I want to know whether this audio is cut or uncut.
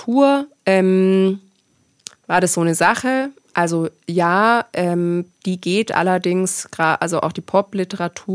uncut